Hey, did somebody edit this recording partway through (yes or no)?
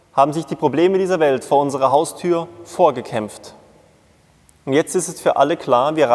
no